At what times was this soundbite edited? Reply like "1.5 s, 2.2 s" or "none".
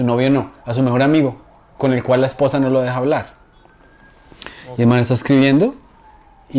1.8 s